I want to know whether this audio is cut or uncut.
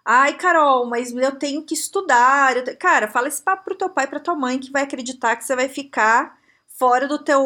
uncut